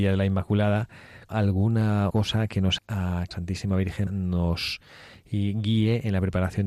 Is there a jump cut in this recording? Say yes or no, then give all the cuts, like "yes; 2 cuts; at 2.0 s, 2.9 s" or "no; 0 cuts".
yes; 5 cuts; at 1.3 s, 2.1 s, 2.8 s, 3.3 s, 4.1 s